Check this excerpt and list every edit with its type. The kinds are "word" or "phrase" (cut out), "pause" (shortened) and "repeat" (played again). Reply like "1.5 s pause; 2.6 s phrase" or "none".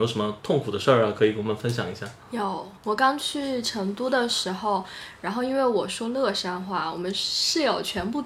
2.8 s pause